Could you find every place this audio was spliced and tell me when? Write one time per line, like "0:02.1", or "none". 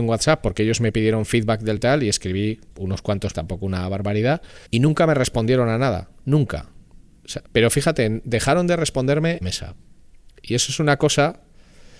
0:01.8
0:02.7
0:03.3
0:04.7
0:07.5
0:09.4